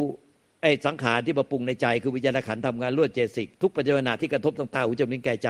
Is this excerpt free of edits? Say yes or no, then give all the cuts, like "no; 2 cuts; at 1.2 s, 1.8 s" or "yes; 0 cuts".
no; 1 cut; at 3.5 s